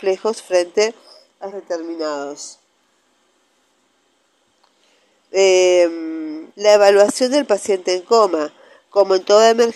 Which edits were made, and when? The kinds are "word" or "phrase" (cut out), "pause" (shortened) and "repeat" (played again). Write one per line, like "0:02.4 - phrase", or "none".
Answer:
0:01.5 - word
0:06.5 - pause